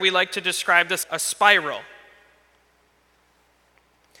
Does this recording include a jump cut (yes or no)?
yes